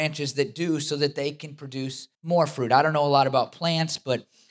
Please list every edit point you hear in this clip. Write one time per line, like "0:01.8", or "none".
0:02.1